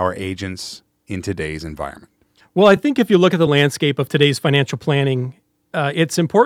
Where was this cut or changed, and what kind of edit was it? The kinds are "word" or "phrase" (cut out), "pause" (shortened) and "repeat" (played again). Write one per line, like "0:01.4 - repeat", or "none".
none